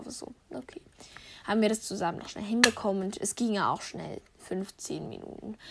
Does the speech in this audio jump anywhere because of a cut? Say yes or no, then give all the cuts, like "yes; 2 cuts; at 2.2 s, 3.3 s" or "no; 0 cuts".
no; 0 cuts